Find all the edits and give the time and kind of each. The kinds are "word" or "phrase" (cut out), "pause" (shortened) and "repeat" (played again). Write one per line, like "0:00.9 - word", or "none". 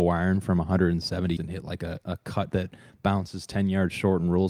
0:01.4 - word
0:02.5 - word